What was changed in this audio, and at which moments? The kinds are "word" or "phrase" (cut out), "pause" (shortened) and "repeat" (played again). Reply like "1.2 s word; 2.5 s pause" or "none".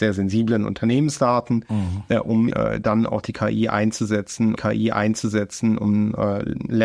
2.5 s word; 4.6 s repeat